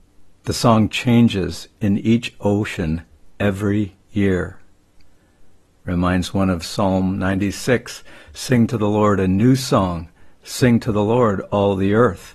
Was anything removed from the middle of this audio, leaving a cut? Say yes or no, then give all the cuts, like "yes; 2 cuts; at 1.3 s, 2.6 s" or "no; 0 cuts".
no; 0 cuts